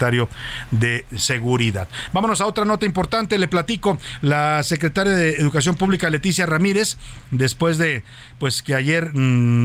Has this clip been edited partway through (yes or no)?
no